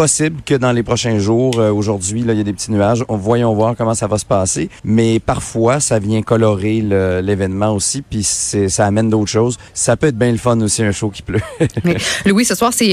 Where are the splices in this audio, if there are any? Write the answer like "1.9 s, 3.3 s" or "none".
4.8 s, 9.7 s